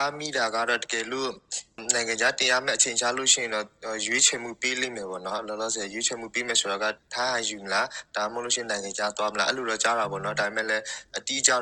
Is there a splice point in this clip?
no; 0 cuts

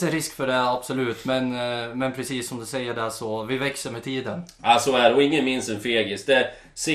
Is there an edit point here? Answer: no; 0 cuts

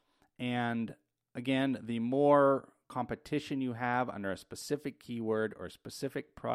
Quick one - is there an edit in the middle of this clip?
no; 0 cuts

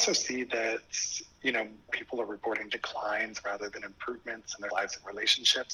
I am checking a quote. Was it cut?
yes; 2 cuts; at 1.9 s, 4.7 s

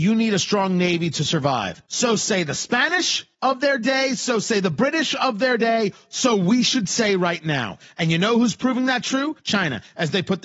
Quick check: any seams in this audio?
yes; 3 cuts; at 1.8 s, 3.3 s, 9.4 s

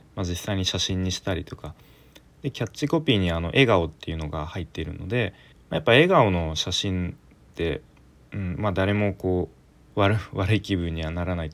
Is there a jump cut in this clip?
yes; 2 cuts; at 5.5 s, 8.0 s

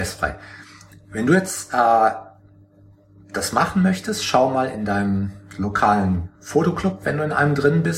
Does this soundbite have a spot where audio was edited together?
no; 0 cuts

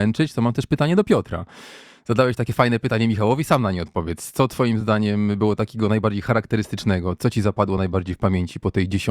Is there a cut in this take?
no; 0 cuts

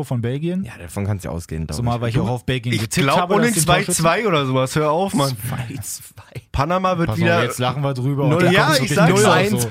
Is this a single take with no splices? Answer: no; 3 cuts; at 1.2 s, 3.5 s, 6.5 s

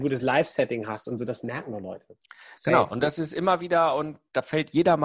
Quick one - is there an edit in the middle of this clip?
no; 0 cuts

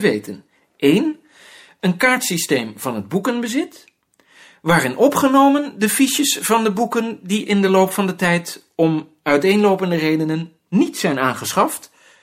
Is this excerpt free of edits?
yes; 0 cuts

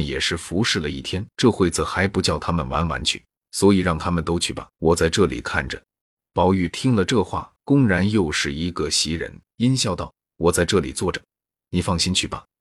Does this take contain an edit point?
yes; 6 cuts; at 1.3 s, 3.4 s, 4.7 s, 6.0 s, 7.6 s, 9.5 s

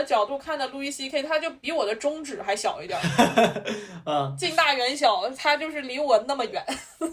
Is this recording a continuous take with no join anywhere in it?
yes; 0 cuts

